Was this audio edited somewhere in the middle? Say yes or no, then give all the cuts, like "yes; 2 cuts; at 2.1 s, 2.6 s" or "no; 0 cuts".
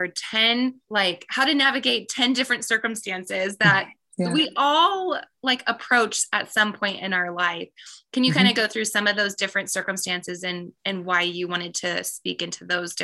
no; 0 cuts